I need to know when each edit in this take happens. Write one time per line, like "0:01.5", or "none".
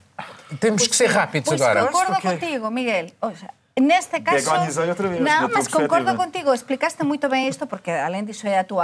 none